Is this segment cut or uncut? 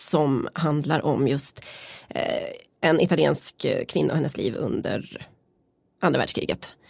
uncut